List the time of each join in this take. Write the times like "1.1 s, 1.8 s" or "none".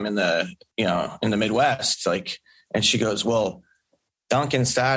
none

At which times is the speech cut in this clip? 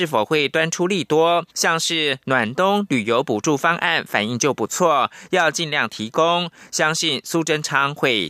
1.5 s

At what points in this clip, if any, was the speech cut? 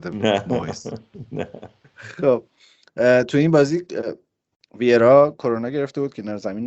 none

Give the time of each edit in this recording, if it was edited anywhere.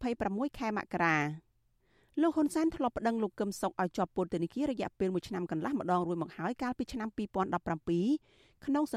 none

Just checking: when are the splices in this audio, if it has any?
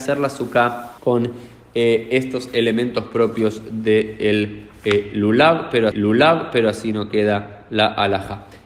1.0 s, 5.9 s

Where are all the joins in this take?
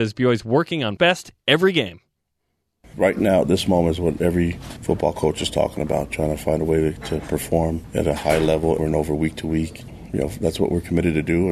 1.0 s, 8.8 s

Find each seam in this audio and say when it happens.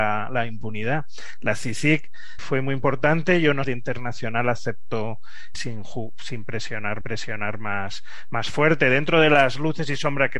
2.4 s, 3.6 s, 5.5 s, 7.0 s

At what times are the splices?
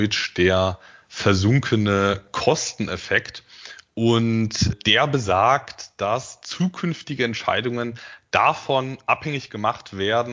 4.7 s

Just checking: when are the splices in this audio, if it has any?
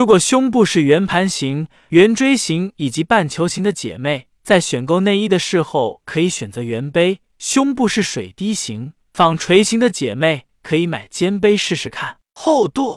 none

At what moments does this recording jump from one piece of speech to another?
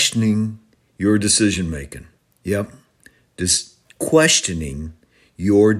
2.2 s

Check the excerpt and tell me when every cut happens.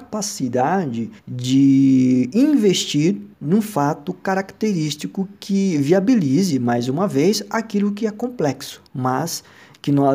1.2 s, 3.3 s, 8.9 s

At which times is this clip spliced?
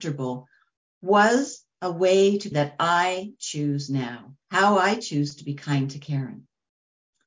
1.7 s, 2.5 s, 4.4 s

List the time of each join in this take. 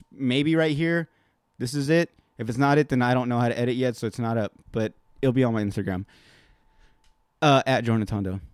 none

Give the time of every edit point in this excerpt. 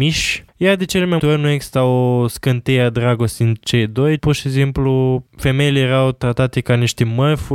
1.2 s, 4.2 s

